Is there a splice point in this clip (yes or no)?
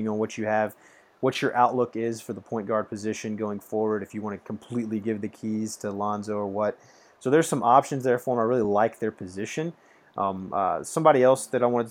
no